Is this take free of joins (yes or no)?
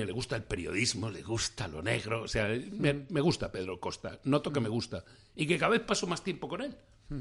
yes